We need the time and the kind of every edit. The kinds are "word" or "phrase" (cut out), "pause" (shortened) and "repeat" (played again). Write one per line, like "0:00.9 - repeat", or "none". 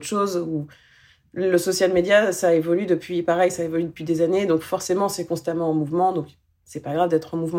none